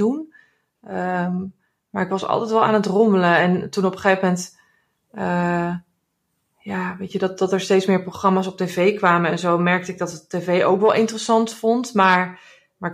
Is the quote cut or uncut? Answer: uncut